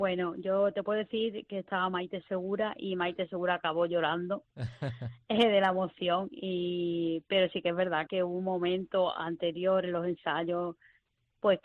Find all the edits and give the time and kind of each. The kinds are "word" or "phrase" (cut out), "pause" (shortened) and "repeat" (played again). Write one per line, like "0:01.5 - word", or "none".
0:08.1 - word